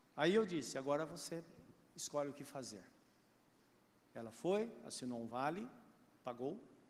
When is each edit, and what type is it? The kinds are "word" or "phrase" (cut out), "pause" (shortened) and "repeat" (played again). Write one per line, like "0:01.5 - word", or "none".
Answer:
none

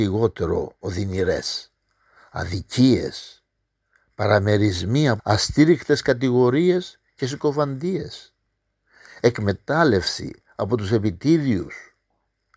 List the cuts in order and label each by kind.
0:05.2 - phrase

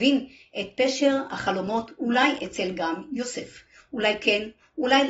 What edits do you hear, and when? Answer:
none

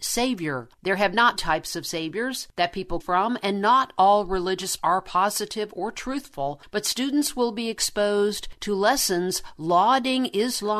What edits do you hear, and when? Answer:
0:01.4 - phrase
0:03.0 - phrase
0:04.8 - word

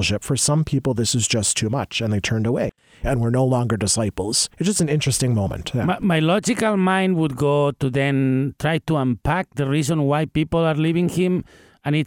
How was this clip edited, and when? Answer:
0:04.5 - pause

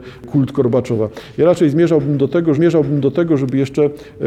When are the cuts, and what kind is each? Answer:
0:02.5 - repeat

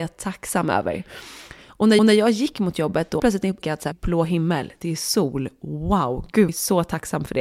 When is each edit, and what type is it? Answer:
0:02.0 - repeat
0:03.2 - word
0:03.6 - word
0:03.9 - phrase
0:06.5 - phrase

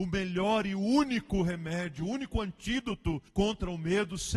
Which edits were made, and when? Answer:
0:03.3 - pause

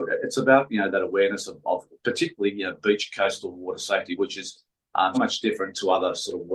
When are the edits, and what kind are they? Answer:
0:05.1 - word

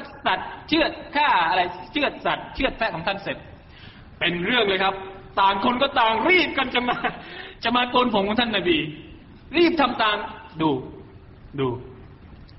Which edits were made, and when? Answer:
none

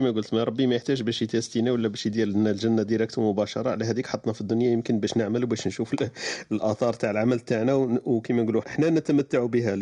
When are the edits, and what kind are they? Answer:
0:08.6 - word

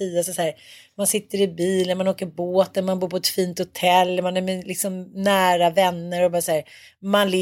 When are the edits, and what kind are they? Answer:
none

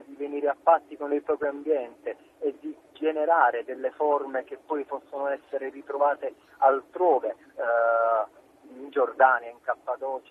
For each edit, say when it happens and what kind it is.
none

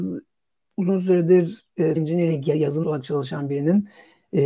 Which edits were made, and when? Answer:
0:02.0 - word
0:02.8 - word

